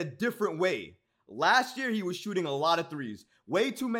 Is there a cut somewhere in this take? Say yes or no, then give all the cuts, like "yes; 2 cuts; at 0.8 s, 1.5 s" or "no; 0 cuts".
no; 0 cuts